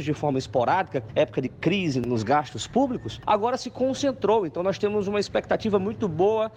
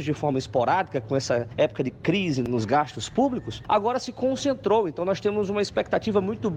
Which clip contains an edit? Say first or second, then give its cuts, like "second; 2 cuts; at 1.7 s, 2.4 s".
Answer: first; 1 cut; at 1.1 s